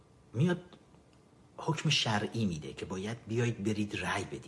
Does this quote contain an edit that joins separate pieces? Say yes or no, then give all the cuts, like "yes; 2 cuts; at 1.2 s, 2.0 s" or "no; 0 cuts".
no; 0 cuts